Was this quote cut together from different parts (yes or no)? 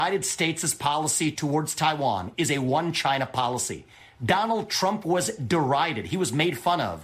no